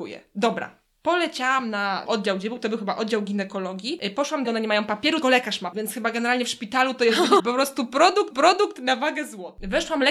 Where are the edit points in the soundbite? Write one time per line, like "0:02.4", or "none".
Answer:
0:02.1
0:04.4
0:05.2
0:05.7
0:07.4
0:08.3

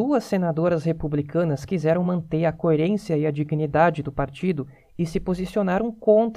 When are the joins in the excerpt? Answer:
none

